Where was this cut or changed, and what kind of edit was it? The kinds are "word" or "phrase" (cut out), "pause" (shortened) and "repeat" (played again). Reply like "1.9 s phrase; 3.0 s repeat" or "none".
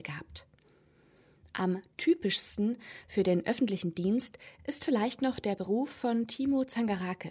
none